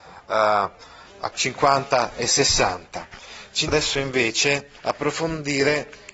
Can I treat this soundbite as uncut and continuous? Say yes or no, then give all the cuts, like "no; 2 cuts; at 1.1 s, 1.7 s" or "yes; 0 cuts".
no; 3 cuts; at 1.3 s, 3.7 s, 4.8 s